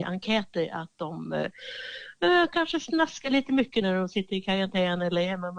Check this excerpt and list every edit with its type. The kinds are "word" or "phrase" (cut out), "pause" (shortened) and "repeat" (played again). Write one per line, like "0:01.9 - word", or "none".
0:03.8 - word

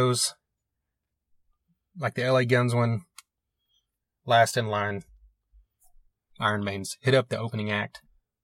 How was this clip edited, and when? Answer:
none

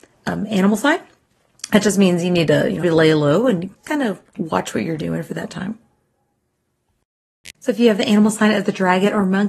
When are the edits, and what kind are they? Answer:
0:02.8 - word
0:03.8 - word
0:07.5 - pause

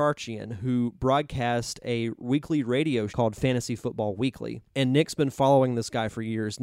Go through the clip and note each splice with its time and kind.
0:03.1 - phrase
0:04.7 - pause

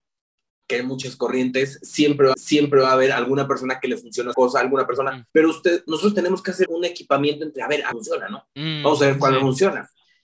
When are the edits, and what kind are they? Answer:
0:02.3 - repeat
0:04.3 - word
0:05.3 - pause
0:06.7 - word
0:07.9 - phrase

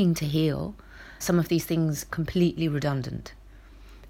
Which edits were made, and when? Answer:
0:01.2 - word
0:02.1 - word

